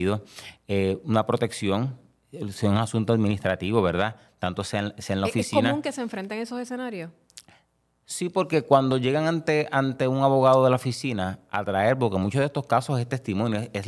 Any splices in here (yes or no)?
no